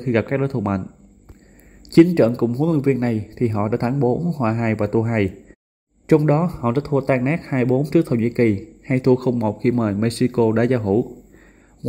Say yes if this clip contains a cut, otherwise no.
no